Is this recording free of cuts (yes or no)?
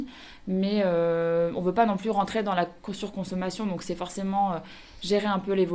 yes